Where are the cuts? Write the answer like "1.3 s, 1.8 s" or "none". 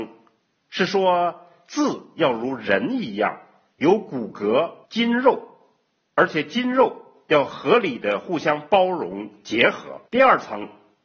4.8 s, 10.1 s